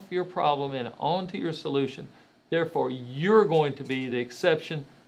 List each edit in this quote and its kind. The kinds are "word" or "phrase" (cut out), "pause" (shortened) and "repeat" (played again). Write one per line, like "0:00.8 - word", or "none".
none